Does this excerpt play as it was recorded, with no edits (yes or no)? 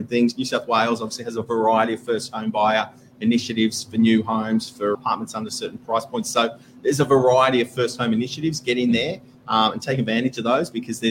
no